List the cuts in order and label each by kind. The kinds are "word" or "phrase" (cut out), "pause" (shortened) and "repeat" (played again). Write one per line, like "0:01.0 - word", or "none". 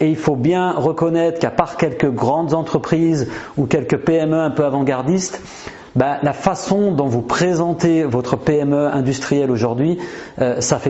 none